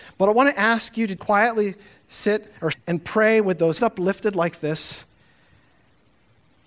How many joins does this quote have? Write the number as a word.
three